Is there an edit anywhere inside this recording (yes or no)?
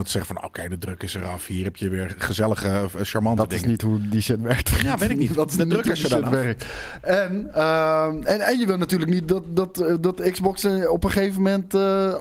no